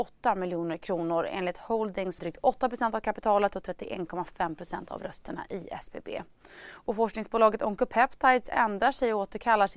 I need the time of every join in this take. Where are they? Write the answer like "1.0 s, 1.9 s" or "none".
2.2 s